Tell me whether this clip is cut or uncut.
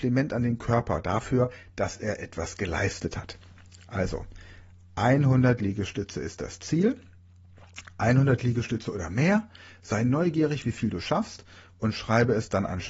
uncut